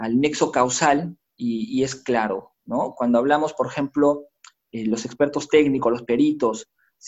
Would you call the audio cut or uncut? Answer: uncut